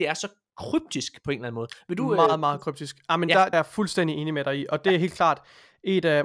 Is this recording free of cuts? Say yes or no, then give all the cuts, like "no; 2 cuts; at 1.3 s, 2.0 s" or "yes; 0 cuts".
no; 1 cut; at 3.5 s